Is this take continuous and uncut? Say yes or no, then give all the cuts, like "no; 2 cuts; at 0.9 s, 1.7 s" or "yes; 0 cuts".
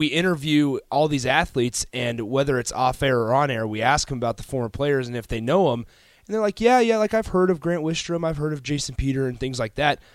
yes; 0 cuts